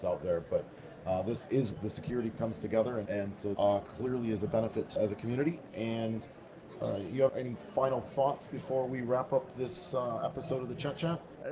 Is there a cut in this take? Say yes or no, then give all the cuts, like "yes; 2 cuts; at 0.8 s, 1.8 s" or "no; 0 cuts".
yes; 6 cuts; at 1.7 s, 2.3 s, 3.1 s, 3.5 s, 5.0 s, 7.3 s